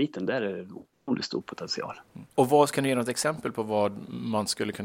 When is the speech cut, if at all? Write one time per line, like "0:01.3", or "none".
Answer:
0:02.3